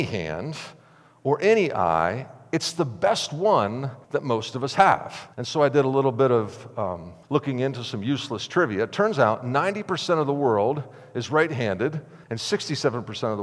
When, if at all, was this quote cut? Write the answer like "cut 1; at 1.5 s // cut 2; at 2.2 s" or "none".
cut 1; at 4.0 s // cut 2; at 5.3 s // cut 3; at 7.2 s // cut 4; at 12.2 s